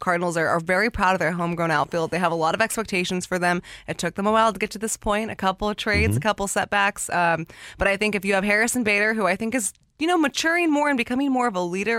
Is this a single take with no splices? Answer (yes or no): yes